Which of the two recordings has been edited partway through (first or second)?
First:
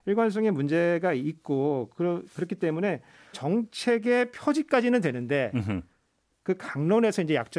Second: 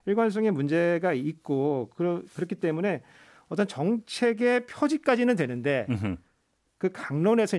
first